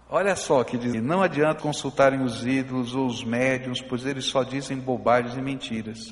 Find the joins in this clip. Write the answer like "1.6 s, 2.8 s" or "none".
0.9 s, 1.6 s